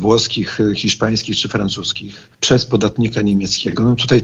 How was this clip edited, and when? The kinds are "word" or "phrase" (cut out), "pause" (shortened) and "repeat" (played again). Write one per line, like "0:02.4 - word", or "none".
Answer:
0:02.3 - pause